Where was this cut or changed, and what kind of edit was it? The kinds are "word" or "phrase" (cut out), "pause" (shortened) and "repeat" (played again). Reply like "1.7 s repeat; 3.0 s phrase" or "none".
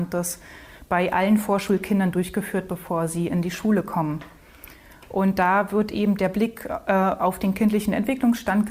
none